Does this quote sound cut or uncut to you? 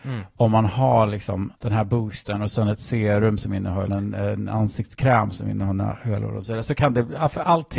cut